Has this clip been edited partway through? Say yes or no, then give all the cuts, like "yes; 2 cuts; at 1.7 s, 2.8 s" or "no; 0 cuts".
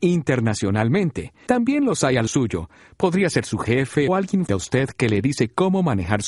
yes; 4 cuts; at 1.5 s, 2.3 s, 4.1 s, 4.5 s